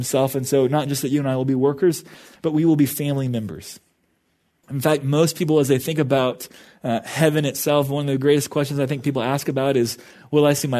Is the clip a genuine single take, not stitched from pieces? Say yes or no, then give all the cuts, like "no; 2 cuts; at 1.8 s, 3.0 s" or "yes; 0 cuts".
yes; 0 cuts